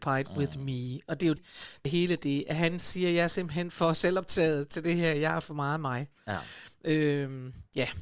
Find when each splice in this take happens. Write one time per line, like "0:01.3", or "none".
0:01.4
0:01.8